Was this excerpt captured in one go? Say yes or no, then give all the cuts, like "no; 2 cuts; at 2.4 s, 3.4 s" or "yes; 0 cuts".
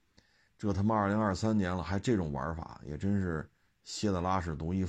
no; 1 cut; at 3.6 s